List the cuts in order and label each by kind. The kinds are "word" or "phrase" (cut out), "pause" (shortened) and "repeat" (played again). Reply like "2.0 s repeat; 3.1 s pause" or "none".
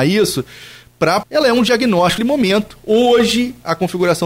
1.2 s phrase; 2.2 s word